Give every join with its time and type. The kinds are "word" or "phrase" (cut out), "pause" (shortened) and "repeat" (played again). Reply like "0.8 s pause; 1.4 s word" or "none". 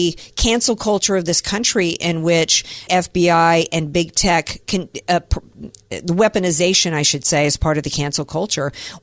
2.9 s word